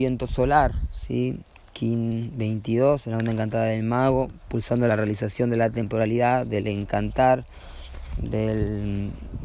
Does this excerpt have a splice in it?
no; 0 cuts

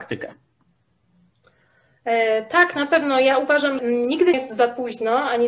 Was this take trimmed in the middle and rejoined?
yes; 2 cuts; at 3.8 s, 4.3 s

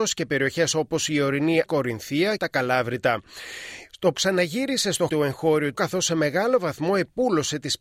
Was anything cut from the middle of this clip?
yes; 5 cuts; at 1.7 s, 2.4 s, 4.1 s, 5.1 s, 5.7 s

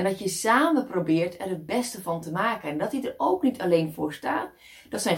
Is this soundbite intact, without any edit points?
yes; 0 cuts

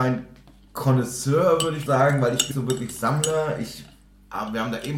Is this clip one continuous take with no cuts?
no; 2 cuts; at 1.9 s, 2.5 s

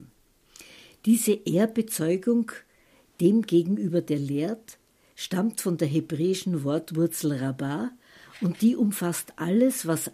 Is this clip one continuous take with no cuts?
yes; 0 cuts

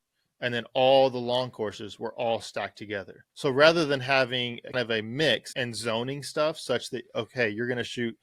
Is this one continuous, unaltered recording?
no; 3 cuts; at 3.3 s, 4.7 s, 5.5 s

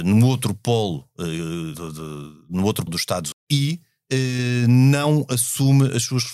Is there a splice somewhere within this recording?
yes; 3 cuts; at 1.7 s, 2.9 s, 3.3 s

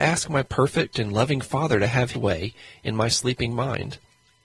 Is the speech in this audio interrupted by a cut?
yes; 1 cut; at 2.1 s

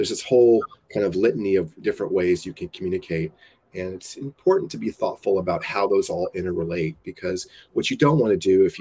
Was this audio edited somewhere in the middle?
no; 0 cuts

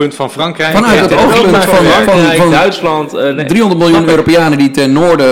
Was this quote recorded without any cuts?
yes; 0 cuts

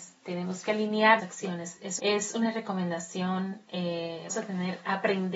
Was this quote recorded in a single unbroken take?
no; 3 cuts; at 1.2 s, 2.0 s, 4.3 s

